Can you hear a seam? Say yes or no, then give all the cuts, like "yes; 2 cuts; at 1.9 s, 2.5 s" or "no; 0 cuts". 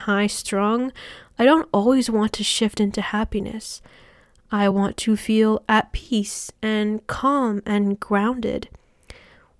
no; 0 cuts